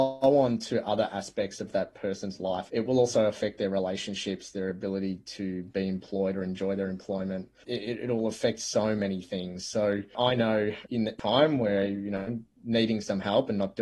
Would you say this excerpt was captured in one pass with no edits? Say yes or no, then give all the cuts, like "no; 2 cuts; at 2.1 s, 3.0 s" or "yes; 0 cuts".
no; 1 cut; at 2.7 s